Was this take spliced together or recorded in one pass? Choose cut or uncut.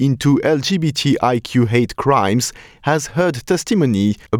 uncut